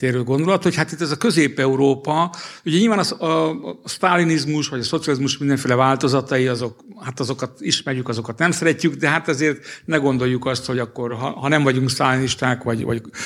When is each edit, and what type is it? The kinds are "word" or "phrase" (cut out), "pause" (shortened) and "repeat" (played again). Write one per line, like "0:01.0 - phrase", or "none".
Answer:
none